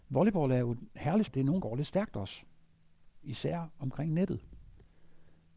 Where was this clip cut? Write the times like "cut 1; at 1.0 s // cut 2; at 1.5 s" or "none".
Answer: cut 1; at 1.3 s // cut 2; at 1.6 s